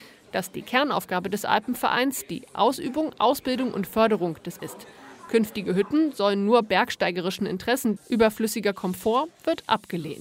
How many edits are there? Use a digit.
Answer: 2